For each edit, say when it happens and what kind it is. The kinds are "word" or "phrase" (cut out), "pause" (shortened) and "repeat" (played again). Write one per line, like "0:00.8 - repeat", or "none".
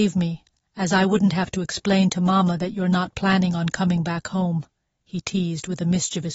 none